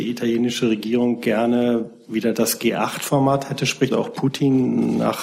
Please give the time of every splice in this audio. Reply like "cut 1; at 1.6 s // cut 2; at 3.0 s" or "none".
cut 1; at 3.9 s